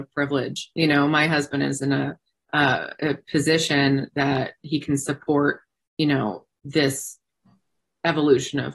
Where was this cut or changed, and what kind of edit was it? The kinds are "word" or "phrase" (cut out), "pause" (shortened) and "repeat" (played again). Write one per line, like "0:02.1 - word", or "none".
none

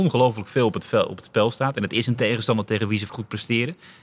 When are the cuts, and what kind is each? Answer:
0:03.1 - word

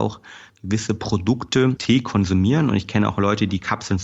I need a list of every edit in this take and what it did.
0:01.8 - word

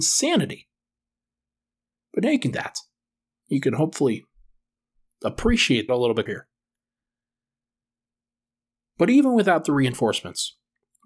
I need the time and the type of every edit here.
0:02.5 - word
0:05.9 - phrase
0:06.3 - word

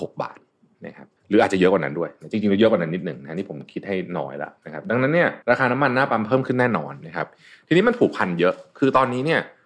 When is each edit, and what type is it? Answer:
0:01.2 - pause
0:05.4 - pause

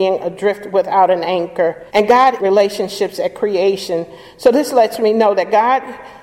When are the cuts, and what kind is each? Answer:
0:01.9 - pause
0:02.4 - word

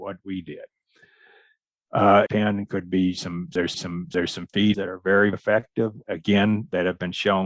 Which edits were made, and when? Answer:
0:02.3 - phrase
0:03.7 - repeat
0:04.7 - word
0:05.3 - word

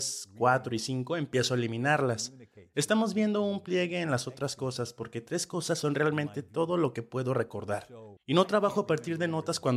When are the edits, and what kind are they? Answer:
0:08.2 - pause

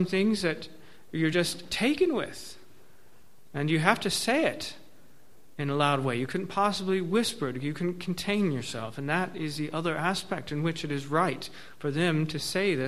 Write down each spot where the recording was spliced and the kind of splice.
none

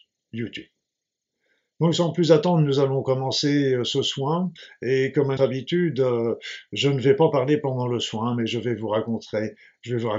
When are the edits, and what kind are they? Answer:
0:05.4 - word

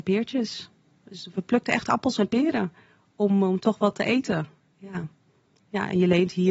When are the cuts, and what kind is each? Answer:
none

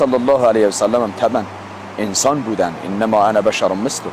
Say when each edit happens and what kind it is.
none

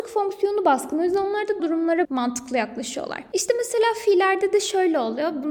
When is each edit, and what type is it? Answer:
0:01.6 - word
0:02.0 - word

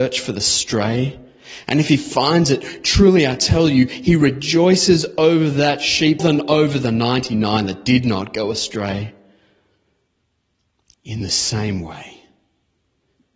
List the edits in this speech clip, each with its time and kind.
0:06.2 - word

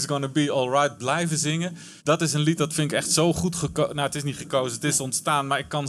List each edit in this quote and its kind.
0:02.0 - pause

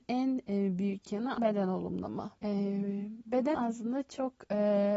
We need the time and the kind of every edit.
0:01.4 - word
0:02.4 - pause
0:03.5 - word

